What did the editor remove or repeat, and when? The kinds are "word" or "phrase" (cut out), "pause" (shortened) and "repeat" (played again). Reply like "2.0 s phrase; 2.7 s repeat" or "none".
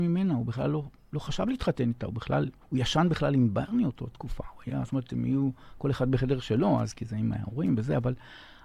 2.6 s pause